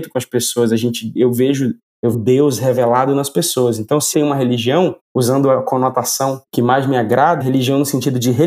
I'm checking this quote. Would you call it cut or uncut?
cut